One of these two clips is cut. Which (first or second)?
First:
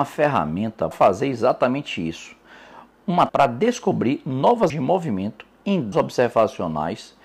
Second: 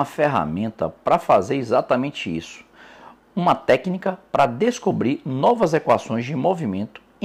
first